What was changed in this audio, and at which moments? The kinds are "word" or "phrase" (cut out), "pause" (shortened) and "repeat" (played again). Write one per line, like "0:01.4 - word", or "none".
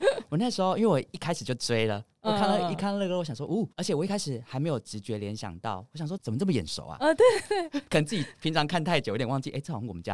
0:03.7 - pause